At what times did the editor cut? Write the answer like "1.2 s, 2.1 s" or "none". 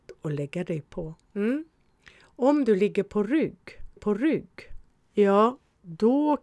1.2 s, 4.0 s

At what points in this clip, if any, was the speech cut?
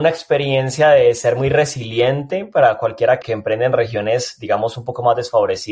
3.2 s

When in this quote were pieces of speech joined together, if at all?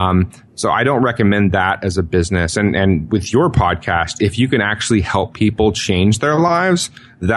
none

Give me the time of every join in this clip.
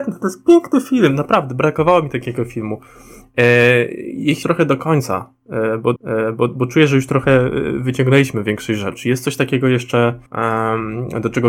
4.4 s, 6.0 s, 10.3 s

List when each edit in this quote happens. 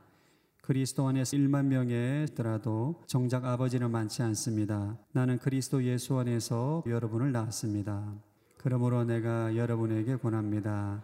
1.3 s, 2.3 s, 3.0 s, 5.0 s, 6.9 s, 8.4 s

